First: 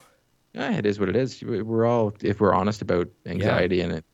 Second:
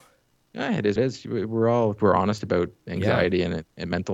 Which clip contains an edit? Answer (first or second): second